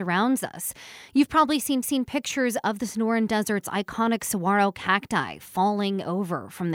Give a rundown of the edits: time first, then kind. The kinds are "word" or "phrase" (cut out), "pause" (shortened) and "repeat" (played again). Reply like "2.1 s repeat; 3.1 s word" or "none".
1.8 s repeat